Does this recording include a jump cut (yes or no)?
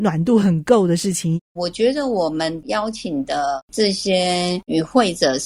yes